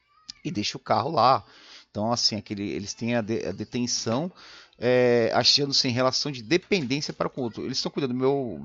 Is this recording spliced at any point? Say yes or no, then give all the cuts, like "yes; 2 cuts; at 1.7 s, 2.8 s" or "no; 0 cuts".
no; 0 cuts